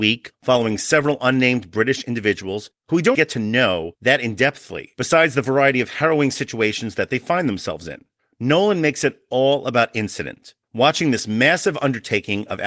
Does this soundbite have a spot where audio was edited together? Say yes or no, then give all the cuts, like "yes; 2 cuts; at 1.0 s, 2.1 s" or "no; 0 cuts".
yes; 4 cuts; at 2.8 s, 3.1 s, 8.2 s, 10.6 s